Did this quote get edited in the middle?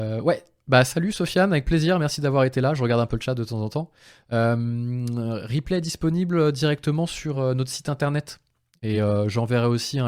no; 0 cuts

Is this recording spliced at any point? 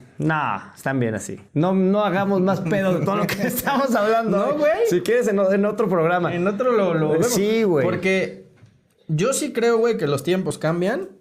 yes; 1 cut; at 1.5 s

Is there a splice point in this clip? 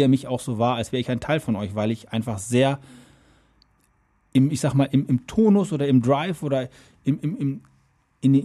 no; 0 cuts

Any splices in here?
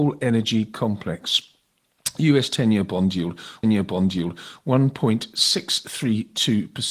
yes; 1 cut; at 3.6 s

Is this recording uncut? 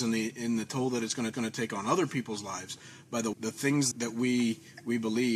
no; 3 cuts; at 1.3 s, 3.3 s, 3.9 s

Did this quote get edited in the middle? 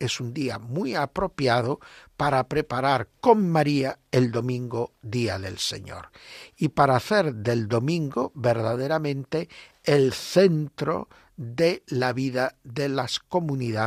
no; 0 cuts

